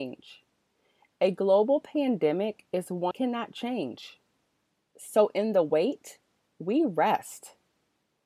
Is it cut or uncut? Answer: cut